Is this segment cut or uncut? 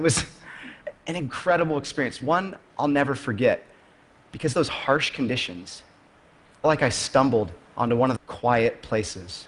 cut